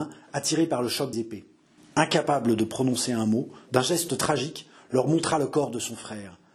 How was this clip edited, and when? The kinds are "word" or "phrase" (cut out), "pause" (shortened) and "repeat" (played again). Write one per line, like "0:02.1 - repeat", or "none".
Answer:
0:01.1 - word
0:01.8 - pause
0:03.7 - word